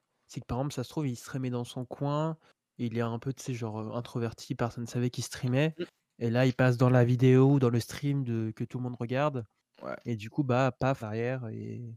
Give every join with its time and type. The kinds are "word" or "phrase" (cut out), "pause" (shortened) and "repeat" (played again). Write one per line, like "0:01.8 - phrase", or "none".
0:11.0 - word

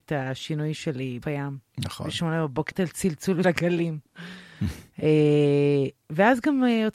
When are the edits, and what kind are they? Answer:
0:01.2 - word
0:02.7 - word
0:03.4 - word

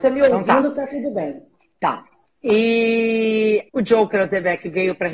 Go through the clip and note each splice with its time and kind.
0:01.6 - pause
0:03.7 - word

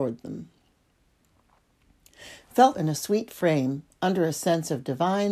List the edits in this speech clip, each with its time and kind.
0:02.7 - word

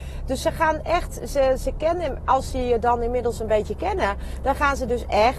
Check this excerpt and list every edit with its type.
none

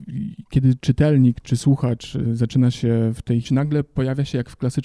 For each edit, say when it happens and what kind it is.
0:01.4 - word
0:03.4 - phrase

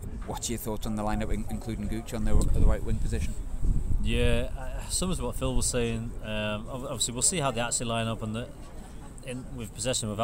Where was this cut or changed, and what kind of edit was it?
none

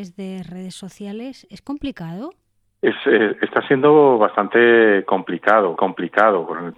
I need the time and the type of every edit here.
0:05.8 - repeat

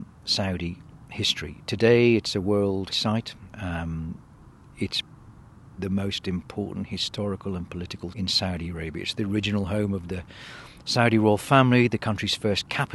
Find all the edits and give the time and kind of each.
0:02.9 - word
0:05.8 - word
0:08.1 - word

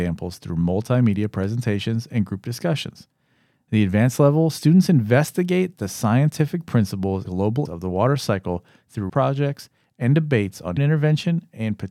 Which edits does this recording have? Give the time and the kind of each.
0:07.2 - word
0:07.6 - word
0:09.1 - word
0:10.8 - word

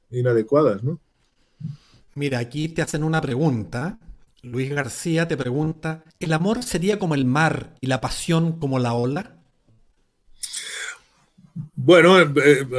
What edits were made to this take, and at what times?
0:04.3 - pause
0:06.1 - pause

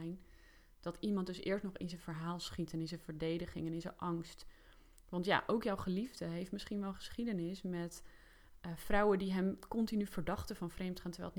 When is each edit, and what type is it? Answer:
none

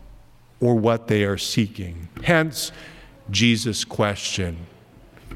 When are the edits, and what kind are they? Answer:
none

